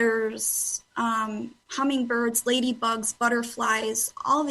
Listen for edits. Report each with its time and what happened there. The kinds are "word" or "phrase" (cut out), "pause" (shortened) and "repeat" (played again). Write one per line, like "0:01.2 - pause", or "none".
0:01.6 - pause